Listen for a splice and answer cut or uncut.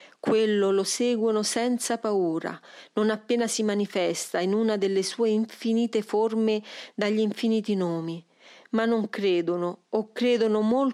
uncut